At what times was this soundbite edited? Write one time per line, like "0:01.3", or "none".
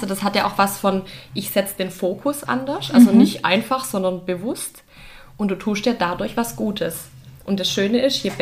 0:02.5